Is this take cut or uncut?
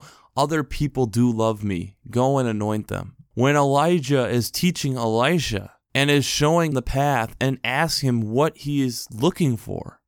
cut